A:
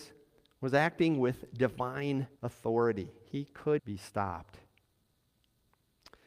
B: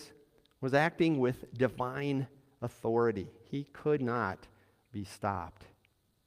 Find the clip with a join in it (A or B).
A